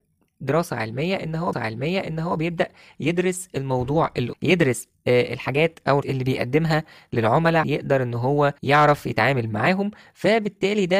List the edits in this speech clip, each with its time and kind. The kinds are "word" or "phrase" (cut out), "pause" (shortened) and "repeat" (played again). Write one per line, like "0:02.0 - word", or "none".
0:01.5 - repeat
0:04.3 - word
0:06.0 - word
0:07.6 - word
0:08.6 - pause